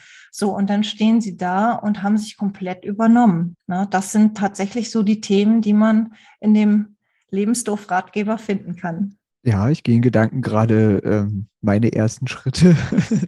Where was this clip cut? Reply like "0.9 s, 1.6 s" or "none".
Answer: none